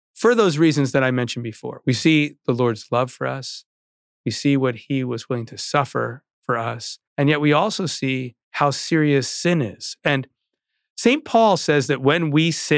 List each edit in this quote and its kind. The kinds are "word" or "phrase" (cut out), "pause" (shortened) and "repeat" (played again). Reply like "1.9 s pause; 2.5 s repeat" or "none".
7.1 s pause; 8.4 s pause

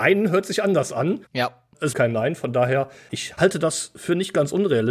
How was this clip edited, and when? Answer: 1.2 s pause; 1.9 s phrase

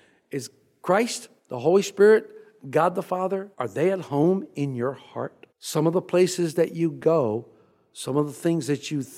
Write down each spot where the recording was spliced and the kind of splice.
1.4 s pause; 3.5 s pause; 5.5 s pause

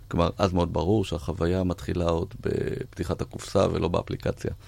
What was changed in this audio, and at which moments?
none

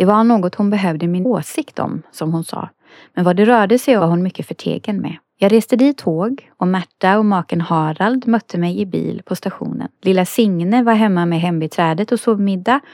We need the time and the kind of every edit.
1.2 s word; 4.0 s word; 5.3 s pause; 6.0 s word; 10.0 s pause

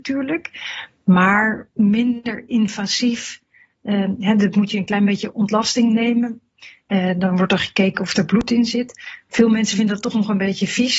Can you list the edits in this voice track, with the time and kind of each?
4.5 s word

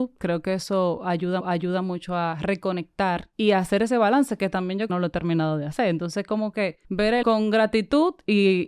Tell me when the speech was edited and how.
1.4 s repeat; 3.3 s pause; 4.9 s phrase; 6.8 s pause; 7.2 s word

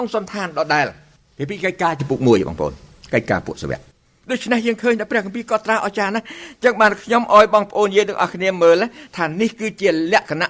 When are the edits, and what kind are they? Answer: none

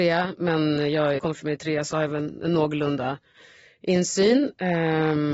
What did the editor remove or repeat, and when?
1.2 s phrase

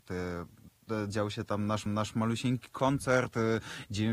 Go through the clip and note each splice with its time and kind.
1.9 s repeat

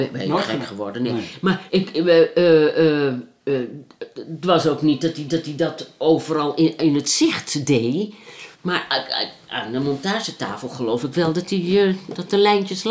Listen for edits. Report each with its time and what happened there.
1.7 s word; 5.3 s repeat; 8.5 s pause

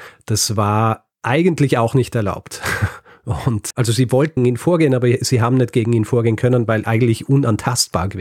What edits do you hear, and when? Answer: 1.1 s pause; 3.7 s word; 4.4 s word; 6.8 s word

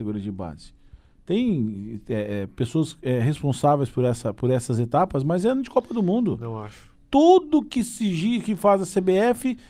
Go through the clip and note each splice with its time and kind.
none

